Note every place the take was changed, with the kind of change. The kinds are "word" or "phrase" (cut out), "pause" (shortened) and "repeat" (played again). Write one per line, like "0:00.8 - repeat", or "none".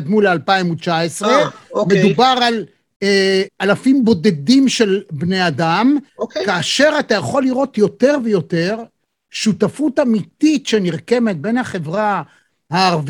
0:03.5 - word
0:06.1 - pause
0:08.2 - word